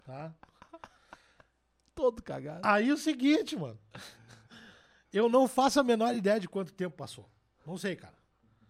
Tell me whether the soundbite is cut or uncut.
uncut